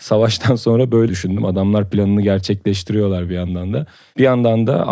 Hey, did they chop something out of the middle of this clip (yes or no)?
yes